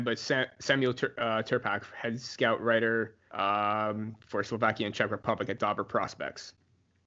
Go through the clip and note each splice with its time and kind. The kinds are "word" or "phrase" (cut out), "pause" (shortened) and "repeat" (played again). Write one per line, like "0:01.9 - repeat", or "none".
0:03.2 - pause